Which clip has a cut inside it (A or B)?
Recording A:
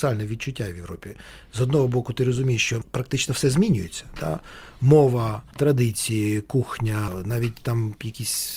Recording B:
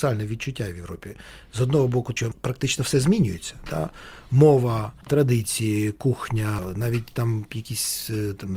B